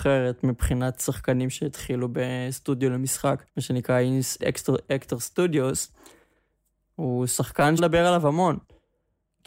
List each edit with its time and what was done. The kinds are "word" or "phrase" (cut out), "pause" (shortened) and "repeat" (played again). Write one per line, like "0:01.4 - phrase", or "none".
0:03.5 - pause
0:04.4 - word
0:07.8 - word